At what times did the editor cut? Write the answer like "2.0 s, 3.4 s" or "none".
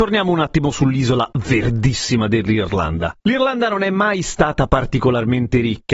3.2 s